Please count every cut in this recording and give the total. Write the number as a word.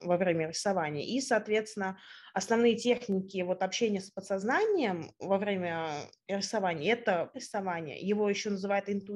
one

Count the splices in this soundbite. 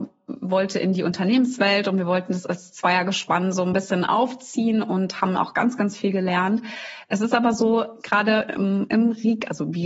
zero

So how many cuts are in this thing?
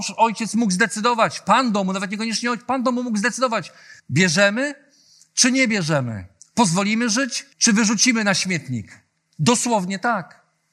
three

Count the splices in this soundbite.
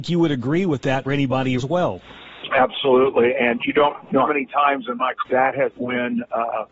six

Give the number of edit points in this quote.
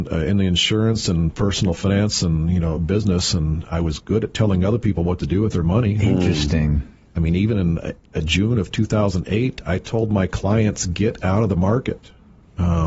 zero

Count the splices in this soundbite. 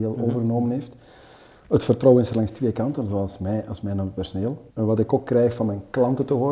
one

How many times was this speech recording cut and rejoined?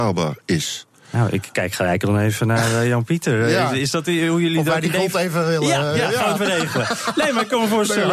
one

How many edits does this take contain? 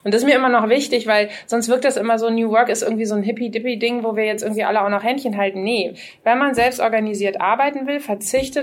zero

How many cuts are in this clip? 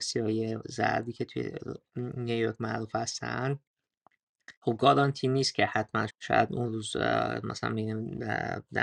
two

